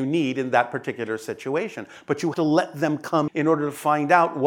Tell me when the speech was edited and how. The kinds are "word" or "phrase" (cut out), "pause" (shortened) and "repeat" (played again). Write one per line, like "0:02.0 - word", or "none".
0:02.3 - word
0:03.3 - word